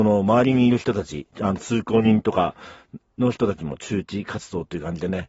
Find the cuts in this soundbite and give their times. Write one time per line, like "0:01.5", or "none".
0:01.3